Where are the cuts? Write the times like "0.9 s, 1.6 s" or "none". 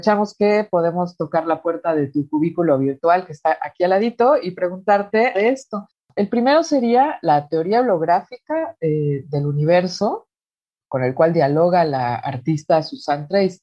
5.3 s